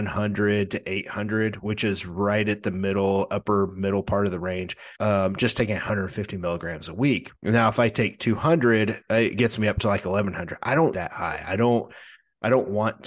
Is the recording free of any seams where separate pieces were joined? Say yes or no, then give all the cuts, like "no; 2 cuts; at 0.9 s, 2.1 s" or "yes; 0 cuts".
no; 3 cuts; at 4.9 s, 7.4 s, 10.9 s